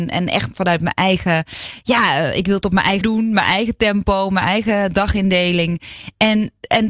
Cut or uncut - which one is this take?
cut